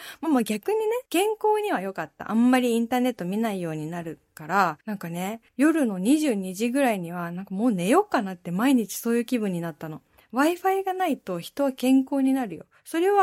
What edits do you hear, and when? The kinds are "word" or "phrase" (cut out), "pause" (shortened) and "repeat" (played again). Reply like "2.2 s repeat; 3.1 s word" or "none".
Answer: 1.1 s pause; 4.8 s pause; 5.5 s pause